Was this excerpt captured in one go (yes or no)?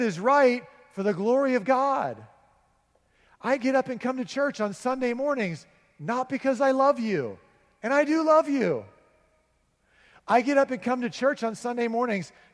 yes